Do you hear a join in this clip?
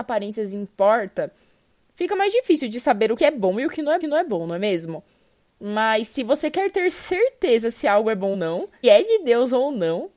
yes; 4 cuts; at 3.2 s, 4.0 s, 8.3 s, 8.8 s

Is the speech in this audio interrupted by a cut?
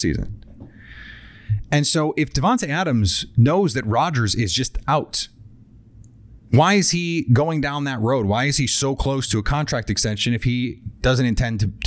yes; 1 cut; at 6.4 s

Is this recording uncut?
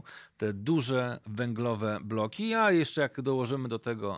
yes; 0 cuts

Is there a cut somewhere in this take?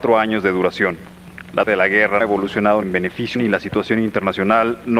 yes; 4 cuts; at 1.7 s, 2.2 s, 2.8 s, 3.3 s

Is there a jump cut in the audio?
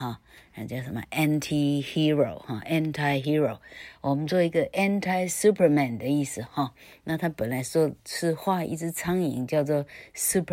no; 0 cuts

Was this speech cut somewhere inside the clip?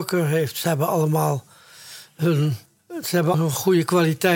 yes; 2 cuts; at 2.7 s, 3.3 s

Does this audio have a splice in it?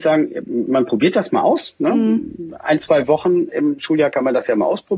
no; 0 cuts

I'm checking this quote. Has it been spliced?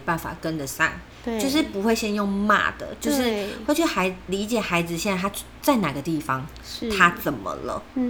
yes; 1 cut; at 1.1 s

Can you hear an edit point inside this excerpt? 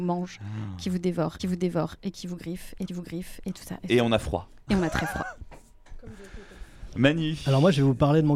yes; 2 cuts; at 1.4 s, 2.9 s

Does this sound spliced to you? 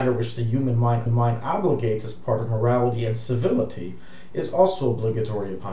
yes; 1 cut; at 1.1 s

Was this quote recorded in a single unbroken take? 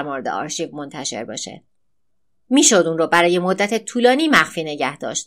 yes; 0 cuts

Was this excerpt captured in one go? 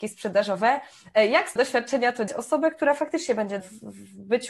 no; 3 cuts; at 1.6 s, 2.3 s, 3.6 s

